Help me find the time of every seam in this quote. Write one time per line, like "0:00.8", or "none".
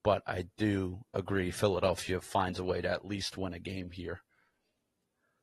none